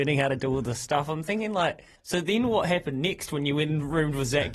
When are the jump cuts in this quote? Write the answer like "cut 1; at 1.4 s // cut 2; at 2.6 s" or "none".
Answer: cut 1; at 2.0 s